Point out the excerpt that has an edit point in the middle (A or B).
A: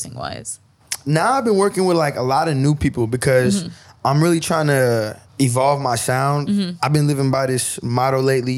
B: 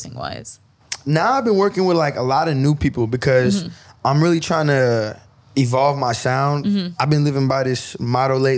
A